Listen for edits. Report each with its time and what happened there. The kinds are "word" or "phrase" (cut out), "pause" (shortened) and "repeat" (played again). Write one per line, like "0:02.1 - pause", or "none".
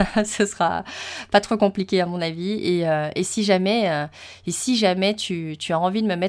none